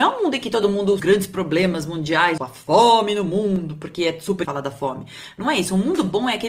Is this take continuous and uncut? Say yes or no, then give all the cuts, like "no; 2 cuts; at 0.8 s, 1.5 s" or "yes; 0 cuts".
no; 3 cuts; at 1.0 s, 2.4 s, 4.4 s